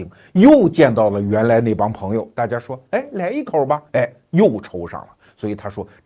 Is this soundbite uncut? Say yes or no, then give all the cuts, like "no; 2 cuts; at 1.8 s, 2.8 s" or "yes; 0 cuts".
yes; 0 cuts